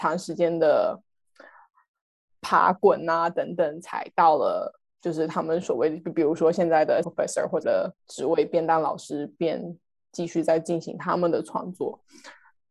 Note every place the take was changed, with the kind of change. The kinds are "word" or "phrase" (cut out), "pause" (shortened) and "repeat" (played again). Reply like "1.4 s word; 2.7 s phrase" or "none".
4.9 s pause; 7.0 s word; 7.6 s word; 8.0 s pause